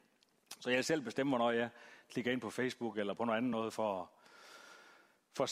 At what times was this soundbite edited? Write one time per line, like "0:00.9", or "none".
none